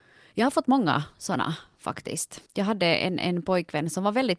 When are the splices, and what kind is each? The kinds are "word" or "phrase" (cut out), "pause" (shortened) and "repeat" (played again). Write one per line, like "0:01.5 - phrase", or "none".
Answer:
0:02.5 - pause